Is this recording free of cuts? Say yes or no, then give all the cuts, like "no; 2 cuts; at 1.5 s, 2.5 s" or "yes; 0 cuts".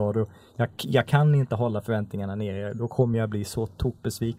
yes; 0 cuts